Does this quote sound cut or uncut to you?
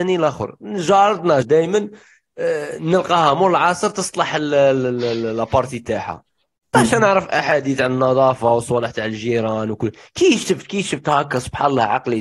cut